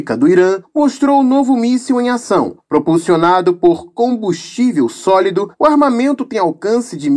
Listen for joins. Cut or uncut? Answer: uncut